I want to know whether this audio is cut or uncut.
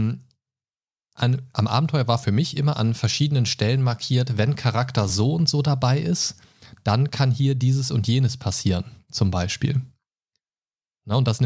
uncut